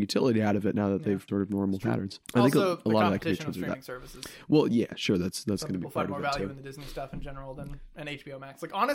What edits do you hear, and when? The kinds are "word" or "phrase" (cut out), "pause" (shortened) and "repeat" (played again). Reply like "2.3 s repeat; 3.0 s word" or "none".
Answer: 1.3 s word; 2.2 s pause